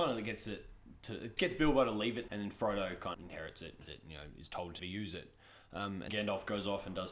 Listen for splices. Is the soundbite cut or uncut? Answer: cut